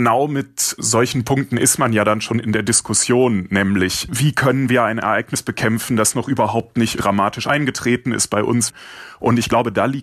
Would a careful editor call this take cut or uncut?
uncut